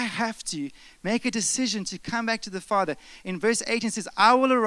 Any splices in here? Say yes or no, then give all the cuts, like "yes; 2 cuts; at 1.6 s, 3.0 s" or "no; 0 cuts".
no; 0 cuts